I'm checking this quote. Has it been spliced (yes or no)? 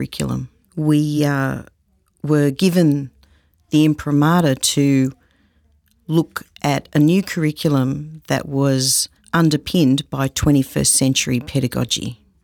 no